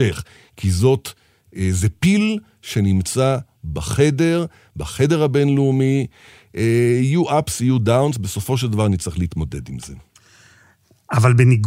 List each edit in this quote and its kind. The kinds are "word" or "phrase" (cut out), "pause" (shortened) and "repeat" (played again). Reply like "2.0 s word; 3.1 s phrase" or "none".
none